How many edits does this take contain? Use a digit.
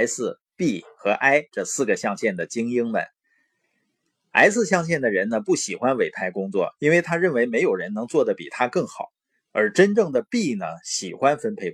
0